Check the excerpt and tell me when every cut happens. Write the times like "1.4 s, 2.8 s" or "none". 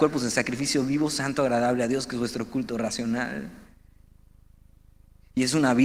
none